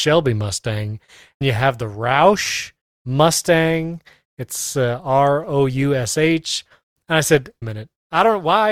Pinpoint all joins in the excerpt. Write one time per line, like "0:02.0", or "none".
0:01.4
0:07.6